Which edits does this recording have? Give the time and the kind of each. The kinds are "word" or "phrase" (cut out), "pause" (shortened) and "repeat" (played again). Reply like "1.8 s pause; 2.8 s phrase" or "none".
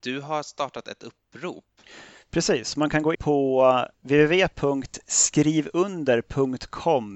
3.1 s word; 3.9 s pause